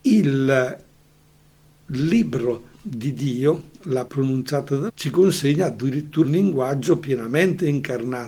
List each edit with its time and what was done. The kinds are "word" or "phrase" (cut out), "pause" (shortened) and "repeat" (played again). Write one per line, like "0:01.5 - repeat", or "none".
0:02.7 - pause
0:04.1 - word
0:04.9 - word
0:06.2 - word